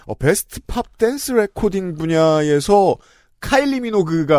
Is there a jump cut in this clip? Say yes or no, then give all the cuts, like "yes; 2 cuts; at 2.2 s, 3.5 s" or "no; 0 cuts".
no; 0 cuts